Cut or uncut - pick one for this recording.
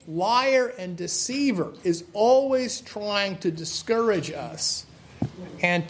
uncut